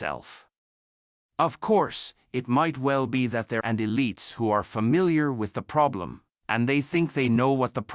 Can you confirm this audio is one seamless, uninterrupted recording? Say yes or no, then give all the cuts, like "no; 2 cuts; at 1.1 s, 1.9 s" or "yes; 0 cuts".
no; 1 cut; at 3.6 s